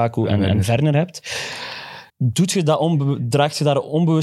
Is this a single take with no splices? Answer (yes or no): no